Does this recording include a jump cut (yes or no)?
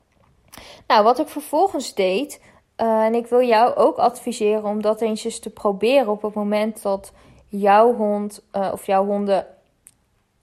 no